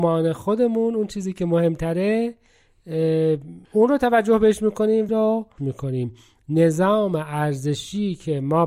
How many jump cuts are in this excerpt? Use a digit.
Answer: 3